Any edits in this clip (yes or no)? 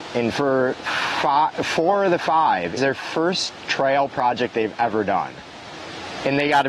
yes